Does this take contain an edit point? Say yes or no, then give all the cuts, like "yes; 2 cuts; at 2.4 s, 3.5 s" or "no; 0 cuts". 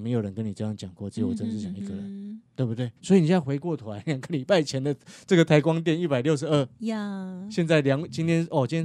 yes; 2 cuts; at 2.5 s, 3.0 s